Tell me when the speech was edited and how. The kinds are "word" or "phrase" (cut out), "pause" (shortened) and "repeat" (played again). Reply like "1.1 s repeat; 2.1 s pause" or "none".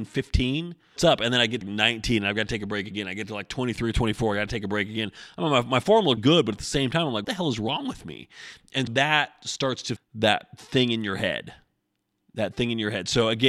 1.0 s word; 1.6 s word; 6.2 s word; 7.2 s word; 8.9 s word; 10.0 s word

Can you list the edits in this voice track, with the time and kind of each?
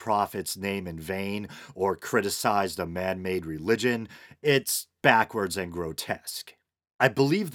none

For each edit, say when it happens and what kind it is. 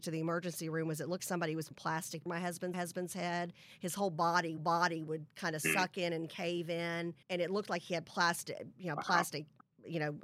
1.2 s word; 1.7 s word; 2.3 s phrase; 2.7 s repeat; 4.6 s repeat; 7.2 s pause

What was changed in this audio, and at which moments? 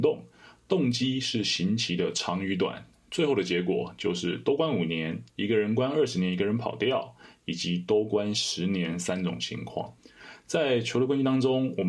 5.3 s pause

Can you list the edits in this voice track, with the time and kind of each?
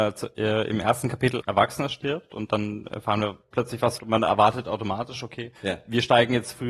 1.4 s word; 4.0 s phrase; 5.6 s pause

